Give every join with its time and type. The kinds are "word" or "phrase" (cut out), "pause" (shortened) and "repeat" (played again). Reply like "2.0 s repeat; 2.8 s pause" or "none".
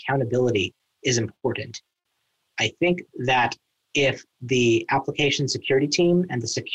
none